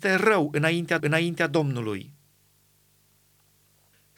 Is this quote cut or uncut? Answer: cut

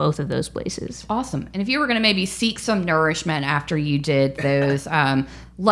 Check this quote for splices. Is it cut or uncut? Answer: uncut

